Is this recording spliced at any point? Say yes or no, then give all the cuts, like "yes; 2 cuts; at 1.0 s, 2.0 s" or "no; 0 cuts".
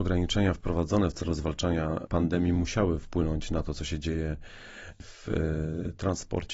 no; 0 cuts